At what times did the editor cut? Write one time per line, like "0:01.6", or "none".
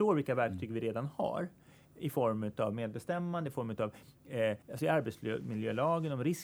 0:04.6